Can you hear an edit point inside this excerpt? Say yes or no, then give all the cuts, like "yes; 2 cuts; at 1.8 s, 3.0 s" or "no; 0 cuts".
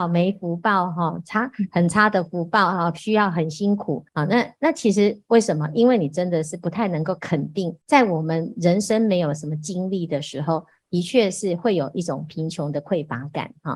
yes; 2 cuts; at 4.1 s, 7.8 s